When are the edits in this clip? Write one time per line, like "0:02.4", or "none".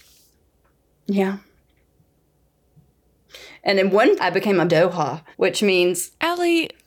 0:04.2
0:04.7
0:05.3